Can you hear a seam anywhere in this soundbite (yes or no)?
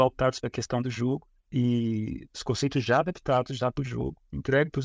no